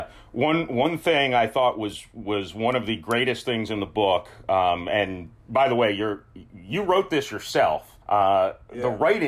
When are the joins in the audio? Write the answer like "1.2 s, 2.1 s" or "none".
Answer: 8.0 s